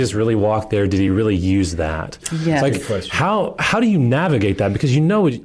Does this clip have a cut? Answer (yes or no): no